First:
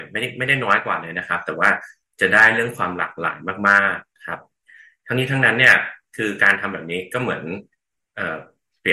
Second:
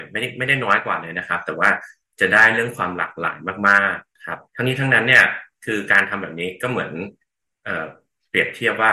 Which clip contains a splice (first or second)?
second